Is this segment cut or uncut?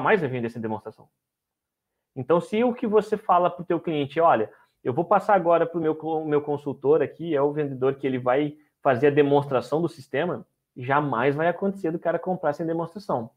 uncut